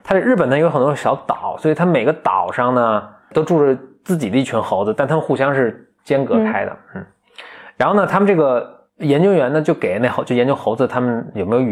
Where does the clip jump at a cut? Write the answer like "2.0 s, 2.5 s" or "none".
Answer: 3.3 s, 6.0 s, 8.9 s